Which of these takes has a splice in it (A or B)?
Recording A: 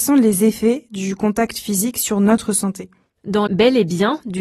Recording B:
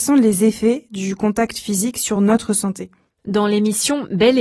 A